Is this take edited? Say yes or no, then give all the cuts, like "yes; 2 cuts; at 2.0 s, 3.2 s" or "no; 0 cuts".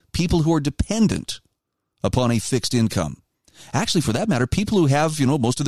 no; 0 cuts